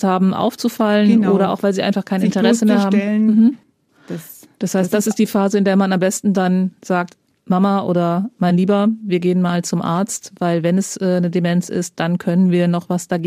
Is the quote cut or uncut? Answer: uncut